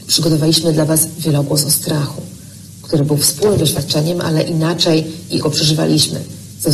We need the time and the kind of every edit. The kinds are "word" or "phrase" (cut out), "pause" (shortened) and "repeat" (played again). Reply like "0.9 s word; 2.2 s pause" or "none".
5.4 s word